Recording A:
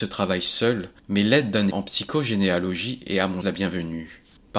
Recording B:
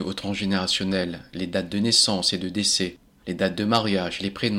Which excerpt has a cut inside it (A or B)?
A